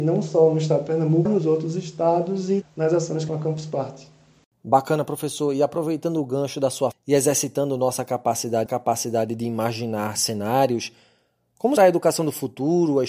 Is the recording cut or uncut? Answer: cut